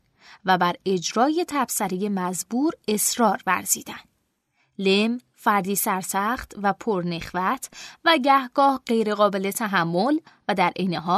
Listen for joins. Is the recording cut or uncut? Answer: uncut